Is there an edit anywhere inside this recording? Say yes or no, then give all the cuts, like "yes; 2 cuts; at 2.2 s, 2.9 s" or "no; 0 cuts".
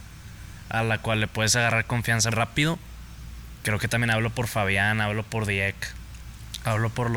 yes; 1 cut; at 2.3 s